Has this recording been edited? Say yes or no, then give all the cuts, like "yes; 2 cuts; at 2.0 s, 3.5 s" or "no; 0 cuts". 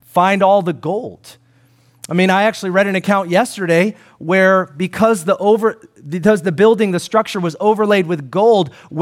no; 0 cuts